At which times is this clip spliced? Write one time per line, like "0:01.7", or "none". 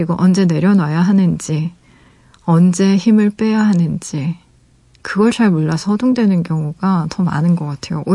none